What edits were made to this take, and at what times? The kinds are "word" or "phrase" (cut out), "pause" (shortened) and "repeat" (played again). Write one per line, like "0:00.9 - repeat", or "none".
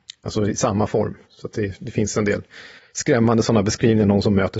0:01.2 - pause
0:02.8 - pause